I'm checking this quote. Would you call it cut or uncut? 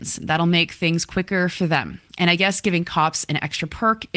uncut